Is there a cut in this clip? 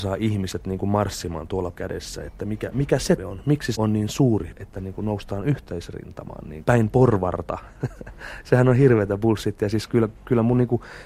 yes; 6 cuts; at 1.7 s, 2.7 s, 3.2 s, 3.8 s, 4.5 s, 6.6 s

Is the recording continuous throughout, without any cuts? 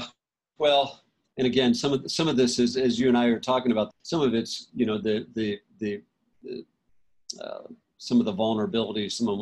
no; 1 cut; at 3.9 s

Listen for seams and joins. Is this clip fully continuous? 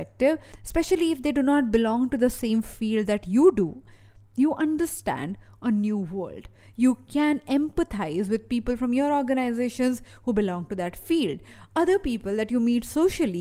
yes; 0 cuts

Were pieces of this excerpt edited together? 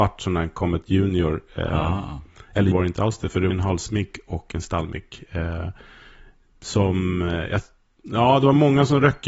yes; 2 cuts; at 2.7 s, 3.5 s

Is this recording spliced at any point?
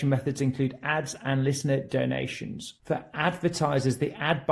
yes; 1 cut; at 2.8 s

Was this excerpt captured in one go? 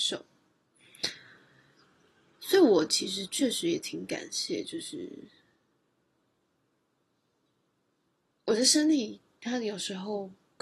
yes; 0 cuts

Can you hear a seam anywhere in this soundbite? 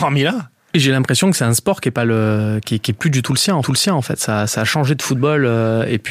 yes; 1 cut; at 3.6 s

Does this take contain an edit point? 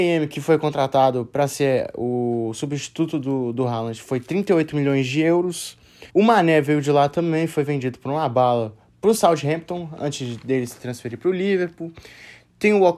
yes; 1 cut; at 6.1 s

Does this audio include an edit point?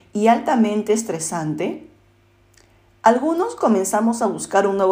no; 0 cuts

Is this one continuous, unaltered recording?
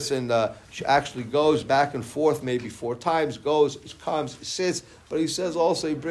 yes; 0 cuts

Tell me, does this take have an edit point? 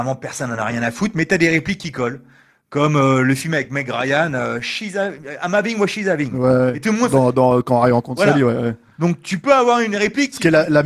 no; 0 cuts

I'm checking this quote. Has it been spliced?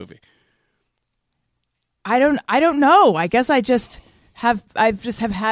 no; 0 cuts

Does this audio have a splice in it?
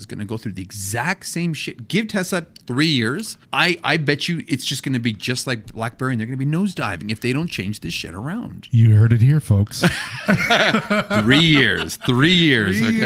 yes; 1 cut; at 3.4 s

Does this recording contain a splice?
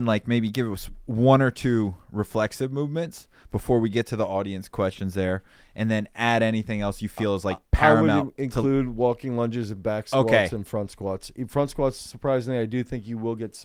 no; 0 cuts

